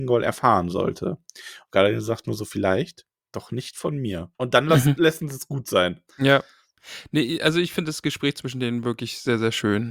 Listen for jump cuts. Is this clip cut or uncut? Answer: cut